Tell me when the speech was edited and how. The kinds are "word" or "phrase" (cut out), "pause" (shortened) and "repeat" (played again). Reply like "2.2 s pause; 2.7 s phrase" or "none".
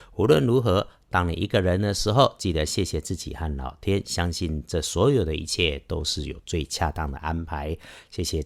none